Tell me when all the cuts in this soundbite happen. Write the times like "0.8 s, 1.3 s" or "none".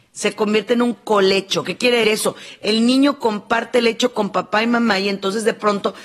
2.0 s